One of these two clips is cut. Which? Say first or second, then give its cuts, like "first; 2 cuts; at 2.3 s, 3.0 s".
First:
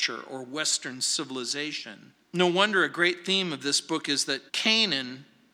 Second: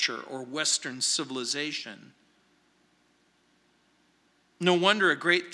first; 2 cuts; at 2.2 s, 4.5 s